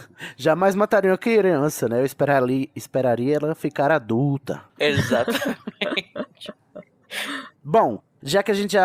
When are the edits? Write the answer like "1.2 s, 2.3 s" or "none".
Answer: 4.7 s

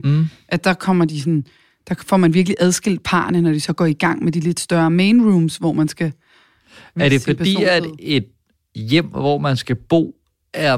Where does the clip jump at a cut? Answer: none

